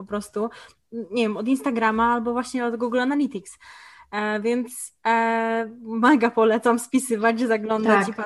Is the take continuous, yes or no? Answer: yes